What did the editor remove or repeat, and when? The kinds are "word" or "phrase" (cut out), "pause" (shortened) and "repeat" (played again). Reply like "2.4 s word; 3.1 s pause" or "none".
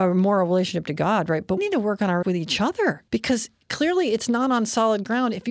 1.6 s word; 2.2 s word; 3.1 s pause